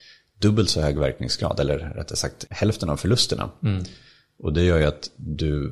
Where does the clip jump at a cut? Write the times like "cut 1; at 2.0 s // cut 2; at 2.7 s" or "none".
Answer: cut 1; at 2.5 s